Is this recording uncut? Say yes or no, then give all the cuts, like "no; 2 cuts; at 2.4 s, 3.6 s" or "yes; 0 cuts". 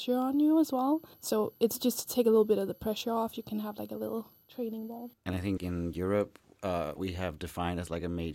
no; 4 cuts; at 1.1 s, 5.2 s, 5.6 s, 7.0 s